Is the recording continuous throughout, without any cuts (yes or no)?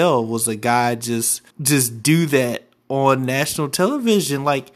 no